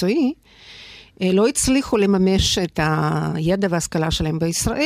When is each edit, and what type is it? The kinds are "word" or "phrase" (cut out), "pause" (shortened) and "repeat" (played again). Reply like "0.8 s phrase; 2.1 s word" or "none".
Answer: none